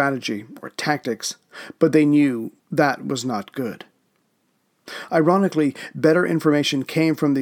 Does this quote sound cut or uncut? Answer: cut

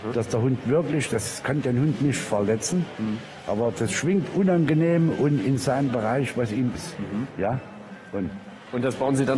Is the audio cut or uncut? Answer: cut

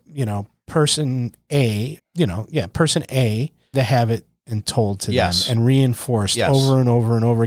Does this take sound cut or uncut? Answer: cut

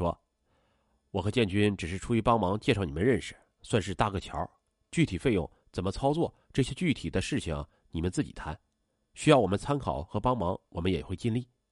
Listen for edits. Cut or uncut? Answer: uncut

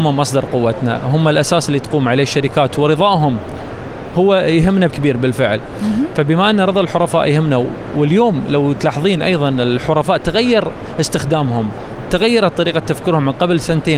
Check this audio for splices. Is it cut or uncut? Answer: cut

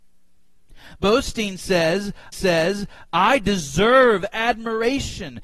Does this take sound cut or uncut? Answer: cut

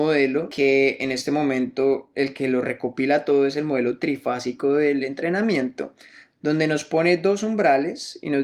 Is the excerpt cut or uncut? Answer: uncut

